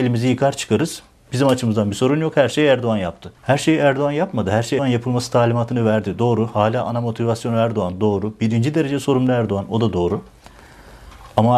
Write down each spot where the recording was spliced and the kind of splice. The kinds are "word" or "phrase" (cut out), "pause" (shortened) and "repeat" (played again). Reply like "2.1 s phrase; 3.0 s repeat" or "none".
3.4 s pause; 4.8 s word